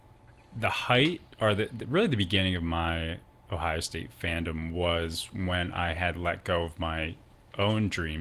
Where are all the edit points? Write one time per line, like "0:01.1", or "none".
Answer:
none

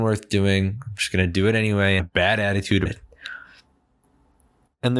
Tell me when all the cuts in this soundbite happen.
0:02.0
0:02.9

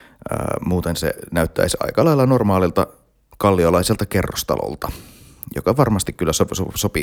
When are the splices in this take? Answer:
none

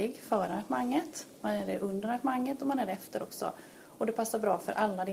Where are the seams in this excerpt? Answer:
none

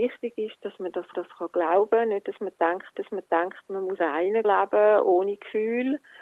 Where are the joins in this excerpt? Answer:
0:01.1
0:02.9
0:04.0
0:04.4

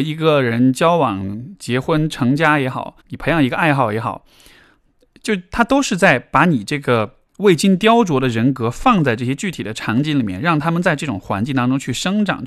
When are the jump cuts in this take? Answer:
0:03.0

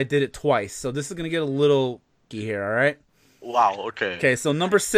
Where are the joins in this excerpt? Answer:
0:02.3

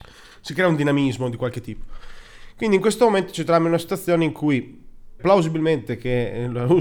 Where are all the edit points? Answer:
0:05.2

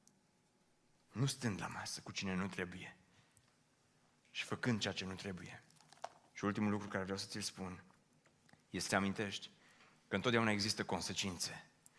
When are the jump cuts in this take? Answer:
0:08.9

